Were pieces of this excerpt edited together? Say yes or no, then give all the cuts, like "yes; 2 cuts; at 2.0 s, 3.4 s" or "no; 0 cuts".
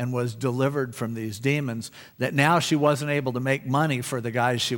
no; 0 cuts